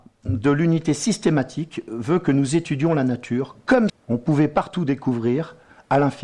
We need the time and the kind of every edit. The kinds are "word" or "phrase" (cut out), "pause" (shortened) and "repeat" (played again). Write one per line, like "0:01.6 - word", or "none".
0:03.9 - word